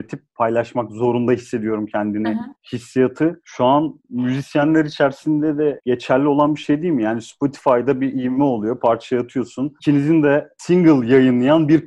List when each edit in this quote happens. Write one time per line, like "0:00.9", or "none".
none

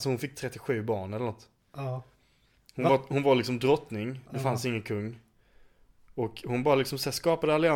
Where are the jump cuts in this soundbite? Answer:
none

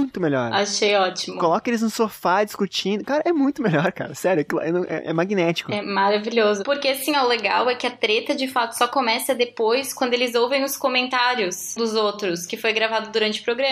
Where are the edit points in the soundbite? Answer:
0:11.8

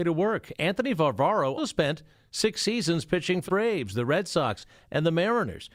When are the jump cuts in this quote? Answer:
0:01.6
0:03.5

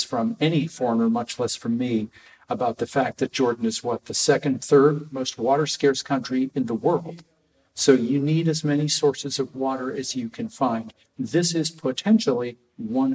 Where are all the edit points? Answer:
none

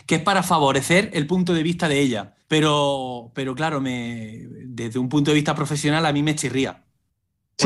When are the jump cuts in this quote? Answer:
0:02.4

